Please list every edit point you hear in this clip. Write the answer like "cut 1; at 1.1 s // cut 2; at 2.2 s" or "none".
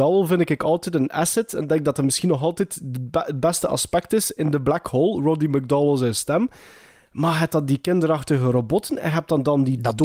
none